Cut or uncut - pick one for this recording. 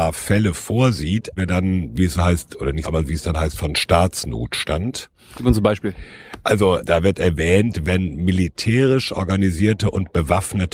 cut